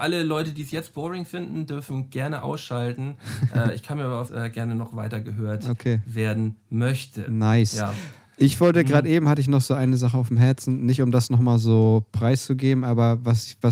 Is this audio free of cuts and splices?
no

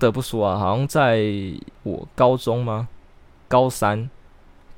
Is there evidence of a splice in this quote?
yes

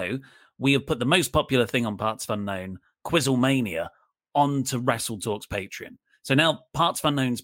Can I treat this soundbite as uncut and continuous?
yes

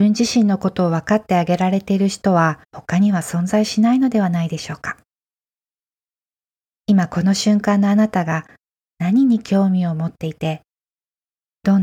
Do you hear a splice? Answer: yes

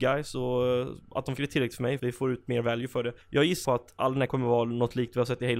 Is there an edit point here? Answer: yes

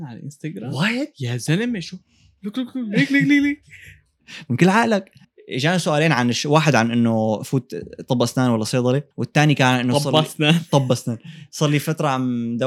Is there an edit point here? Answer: yes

